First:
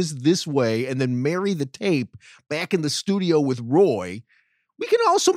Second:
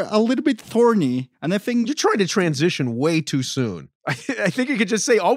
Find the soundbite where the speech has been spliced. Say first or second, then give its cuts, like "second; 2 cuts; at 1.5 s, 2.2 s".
second; 2 cuts; at 1.3 s, 4.0 s